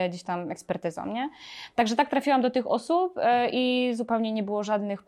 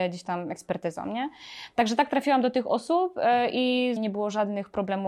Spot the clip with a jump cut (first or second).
second